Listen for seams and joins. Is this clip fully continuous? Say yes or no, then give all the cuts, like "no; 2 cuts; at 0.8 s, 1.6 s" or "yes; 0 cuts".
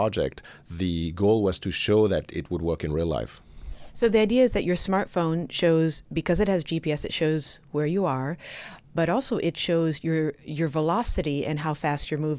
yes; 0 cuts